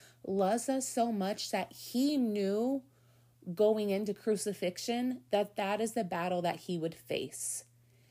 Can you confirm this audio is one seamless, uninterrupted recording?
yes; 0 cuts

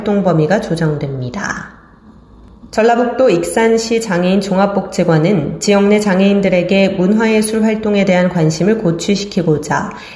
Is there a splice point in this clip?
no; 0 cuts

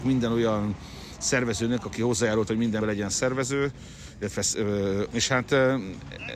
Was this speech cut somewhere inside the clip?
yes; 3 cuts; at 2.5 s, 2.8 s, 5.1 s

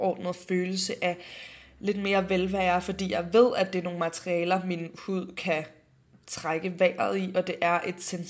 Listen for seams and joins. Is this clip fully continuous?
yes; 0 cuts

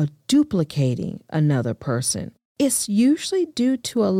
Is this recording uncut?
no; 1 cut; at 2.5 s

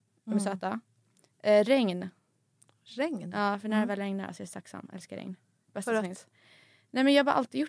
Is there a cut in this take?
no; 0 cuts

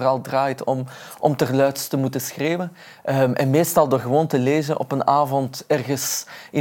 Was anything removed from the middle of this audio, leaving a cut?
no; 0 cuts

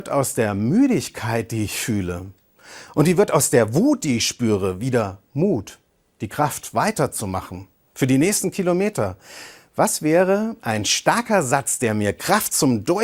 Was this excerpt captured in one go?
yes; 0 cuts

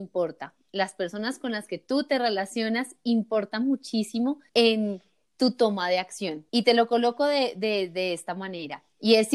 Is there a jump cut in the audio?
yes; 2 cuts; at 4.5 s, 6.5 s

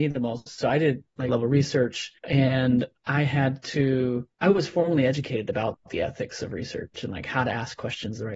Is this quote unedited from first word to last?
no; 3 cuts; at 1.3 s, 2.2 s, 4.3 s

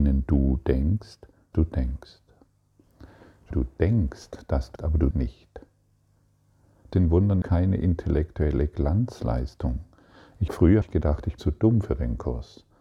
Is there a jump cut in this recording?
yes; 9 cuts; at 1.5 s, 3.5 s, 4.8 s, 5.1 s, 6.9 s, 7.4 s, 10.5 s, 10.8 s, 11.4 s

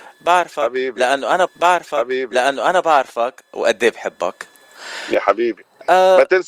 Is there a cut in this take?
yes; 1 cut; at 1.5 s

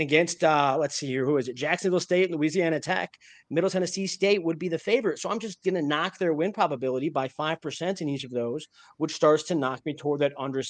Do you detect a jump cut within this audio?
no; 0 cuts

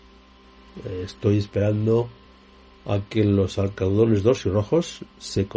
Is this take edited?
no; 0 cuts

